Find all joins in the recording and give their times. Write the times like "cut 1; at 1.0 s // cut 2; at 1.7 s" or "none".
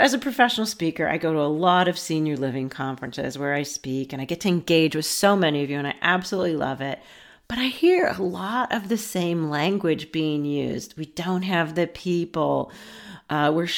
none

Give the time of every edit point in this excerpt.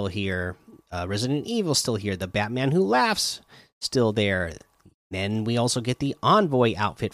none

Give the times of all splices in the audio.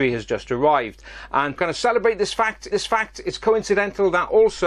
cut 1; at 1.6 s // cut 2; at 2.7 s

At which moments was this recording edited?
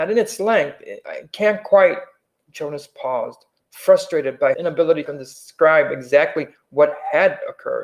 cut 1; at 4.5 s // cut 2; at 5.1 s

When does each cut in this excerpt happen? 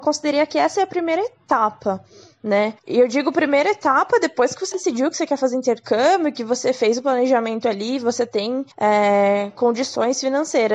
cut 1; at 2.8 s // cut 2; at 4.7 s // cut 3; at 8.7 s

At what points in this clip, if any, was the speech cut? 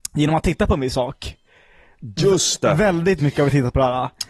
cut 1; at 3.2 s

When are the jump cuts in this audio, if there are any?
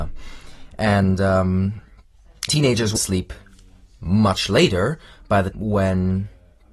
cut 1; at 2.5 s // cut 2; at 3.0 s // cut 3; at 5.5 s

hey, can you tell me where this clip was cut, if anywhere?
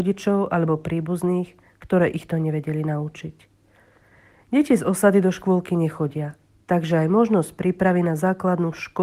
none

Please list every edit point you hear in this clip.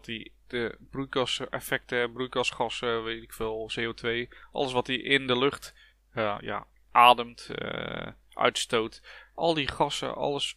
none

